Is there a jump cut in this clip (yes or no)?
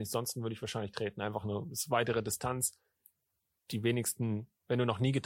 no